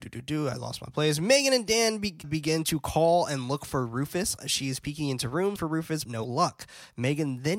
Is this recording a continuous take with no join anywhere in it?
no; 3 cuts; at 2.2 s, 5.6 s, 6.1 s

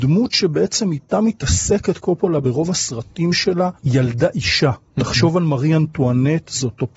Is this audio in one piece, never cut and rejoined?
no; 2 cuts; at 3.8 s, 4.9 s

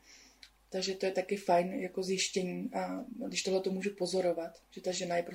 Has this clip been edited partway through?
no; 0 cuts

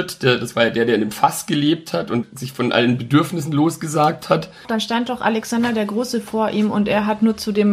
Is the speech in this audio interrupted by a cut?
no; 0 cuts

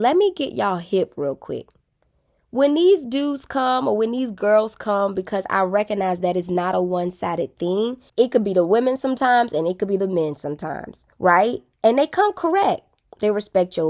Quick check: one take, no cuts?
no; 2 cuts; at 8.1 s, 11.1 s

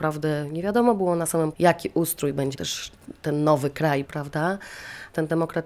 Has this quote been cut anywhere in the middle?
yes; 3 cuts; at 1.5 s, 2.5 s, 4.1 s

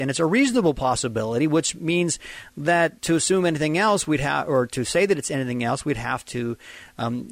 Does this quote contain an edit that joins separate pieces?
yes; 1 cut; at 3.0 s

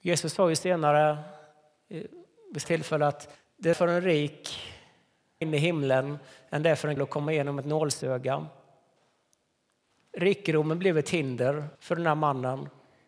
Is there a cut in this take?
yes; 6 cuts; at 2.6 s, 3.3 s, 3.7 s, 5.4 s, 7.0 s, 11.7 s

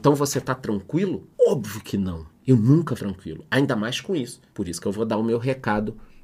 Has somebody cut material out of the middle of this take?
yes; 3 cuts; at 1.3 s, 3.0 s, 4.5 s

